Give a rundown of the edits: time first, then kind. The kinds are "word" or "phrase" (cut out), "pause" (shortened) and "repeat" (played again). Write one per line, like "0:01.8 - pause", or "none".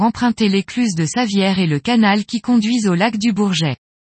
none